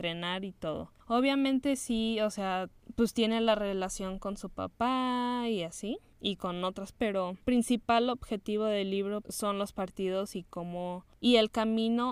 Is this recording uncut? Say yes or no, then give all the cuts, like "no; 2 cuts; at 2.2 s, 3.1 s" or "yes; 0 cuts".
no; 3 cuts; at 6.9 s, 7.4 s, 9.2 s